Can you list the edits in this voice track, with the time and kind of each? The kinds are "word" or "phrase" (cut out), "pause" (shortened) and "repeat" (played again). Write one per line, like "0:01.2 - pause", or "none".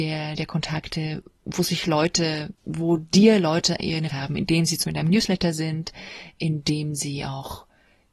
0:02.6 - pause
0:04.1 - phrase
0:04.8 - word